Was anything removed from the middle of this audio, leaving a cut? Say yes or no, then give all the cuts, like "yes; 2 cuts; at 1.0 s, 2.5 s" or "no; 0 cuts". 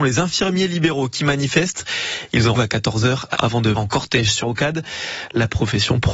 yes; 4 cuts; at 2.5 s, 3.3 s, 3.8 s, 4.4 s